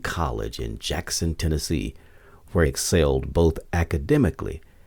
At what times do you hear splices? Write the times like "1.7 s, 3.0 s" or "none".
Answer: 2.7 s